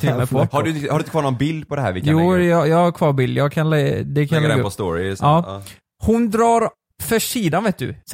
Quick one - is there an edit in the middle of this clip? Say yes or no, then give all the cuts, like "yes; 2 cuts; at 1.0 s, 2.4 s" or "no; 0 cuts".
no; 0 cuts